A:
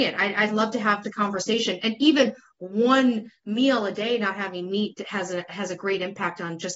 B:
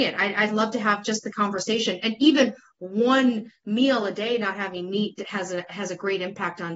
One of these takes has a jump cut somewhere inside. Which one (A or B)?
A